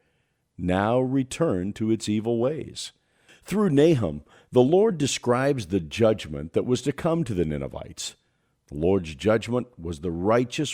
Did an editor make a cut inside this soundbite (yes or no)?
no